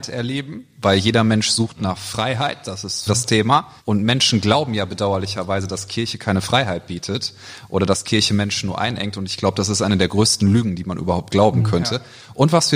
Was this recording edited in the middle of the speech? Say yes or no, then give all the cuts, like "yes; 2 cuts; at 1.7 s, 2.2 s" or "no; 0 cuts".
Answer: yes; 2 cuts; at 3.1 s, 3.8 s